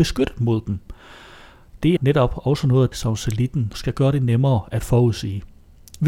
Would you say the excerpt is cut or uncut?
cut